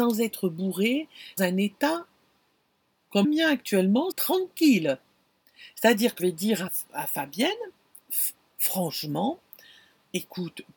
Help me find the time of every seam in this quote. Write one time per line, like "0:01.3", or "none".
0:01.4
0:03.2
0:04.1
0:06.2
0:06.7